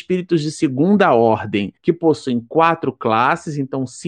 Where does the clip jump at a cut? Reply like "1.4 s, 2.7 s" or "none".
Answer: 1.8 s